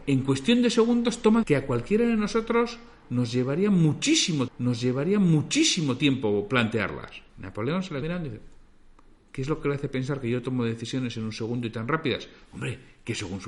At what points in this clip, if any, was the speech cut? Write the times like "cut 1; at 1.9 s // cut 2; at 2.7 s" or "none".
cut 1; at 1.4 s // cut 2; at 4.5 s // cut 3; at 7.3 s // cut 4; at 8.0 s